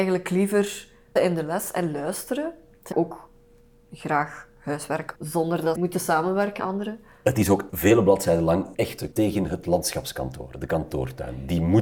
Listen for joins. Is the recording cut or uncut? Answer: cut